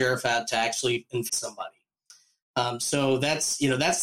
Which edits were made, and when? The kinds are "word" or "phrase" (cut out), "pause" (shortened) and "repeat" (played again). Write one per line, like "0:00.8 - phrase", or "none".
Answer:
0:01.3 - phrase